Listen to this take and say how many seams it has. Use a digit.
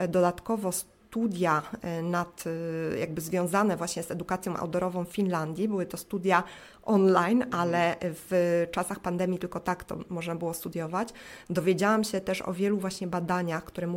0